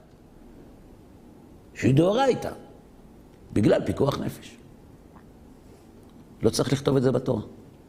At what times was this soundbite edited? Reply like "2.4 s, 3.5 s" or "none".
none

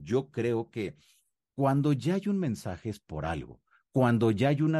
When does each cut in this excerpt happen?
none

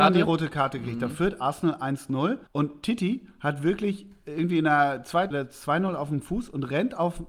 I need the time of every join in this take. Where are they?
2.5 s, 5.3 s

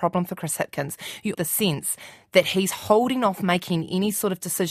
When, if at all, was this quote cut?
1.3 s

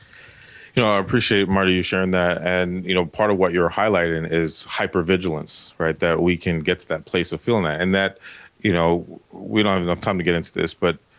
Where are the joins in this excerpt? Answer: none

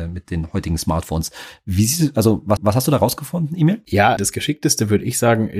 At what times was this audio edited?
2.6 s, 4.2 s

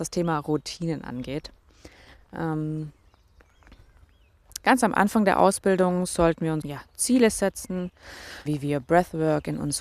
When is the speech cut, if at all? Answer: 4.6 s, 6.6 s, 8.5 s

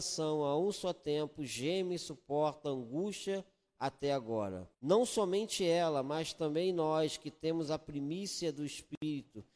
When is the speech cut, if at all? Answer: 4.7 s

